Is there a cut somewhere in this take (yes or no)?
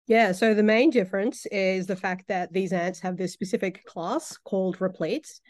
no